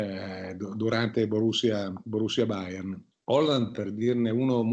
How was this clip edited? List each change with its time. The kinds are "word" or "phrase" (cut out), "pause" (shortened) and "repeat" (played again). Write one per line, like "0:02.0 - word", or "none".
0:03.1 - pause